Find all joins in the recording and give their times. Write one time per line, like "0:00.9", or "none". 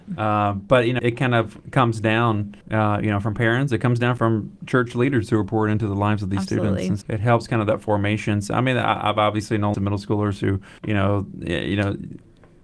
0:01.0
0:02.6
0:04.2
0:07.0
0:09.7
0:10.8

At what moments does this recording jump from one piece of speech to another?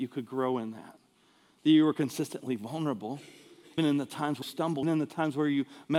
0:03.8
0:04.4
0:04.8

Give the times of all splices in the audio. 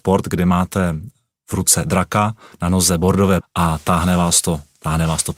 0:03.4

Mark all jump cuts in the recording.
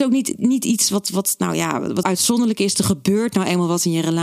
0:02.0

